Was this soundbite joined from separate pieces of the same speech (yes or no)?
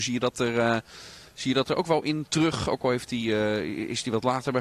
no